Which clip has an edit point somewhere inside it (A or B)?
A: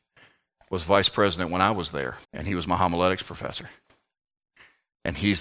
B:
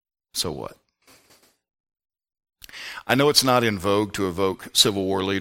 A